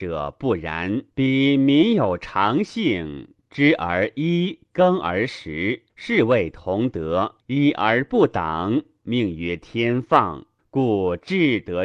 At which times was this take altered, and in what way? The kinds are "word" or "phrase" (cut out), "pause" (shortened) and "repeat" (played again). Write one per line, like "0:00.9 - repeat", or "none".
0:01.1 - pause
0:05.9 - pause
0:07.4 - pause
0:10.6 - pause